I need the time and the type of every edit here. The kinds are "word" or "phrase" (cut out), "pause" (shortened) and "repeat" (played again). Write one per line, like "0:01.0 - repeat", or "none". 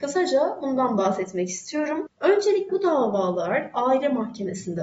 0:02.7 - word